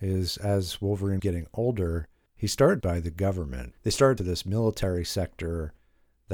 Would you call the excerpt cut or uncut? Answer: cut